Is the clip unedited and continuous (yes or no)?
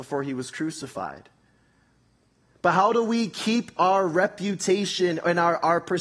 yes